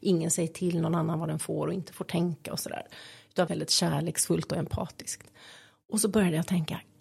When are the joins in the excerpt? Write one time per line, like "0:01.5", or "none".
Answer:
0:03.5